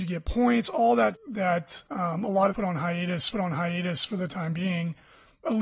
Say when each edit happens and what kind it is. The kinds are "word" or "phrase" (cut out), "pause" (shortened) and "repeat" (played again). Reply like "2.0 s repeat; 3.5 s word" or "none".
1.1 s word; 1.9 s pause; 2.5 s phrase; 3.3 s repeat